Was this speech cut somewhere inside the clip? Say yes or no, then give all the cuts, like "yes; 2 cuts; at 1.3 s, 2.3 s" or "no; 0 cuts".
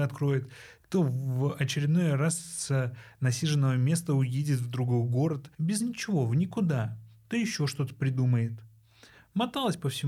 yes; 1 cut; at 5.5 s